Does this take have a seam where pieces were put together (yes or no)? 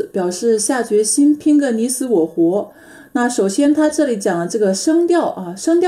no